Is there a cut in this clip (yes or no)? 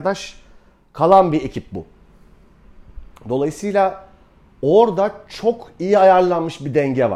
no